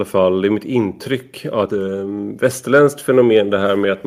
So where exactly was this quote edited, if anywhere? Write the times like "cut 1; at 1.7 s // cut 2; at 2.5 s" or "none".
cut 1; at 1.7 s